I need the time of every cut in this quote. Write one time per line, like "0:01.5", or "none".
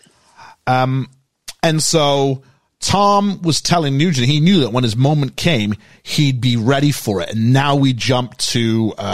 none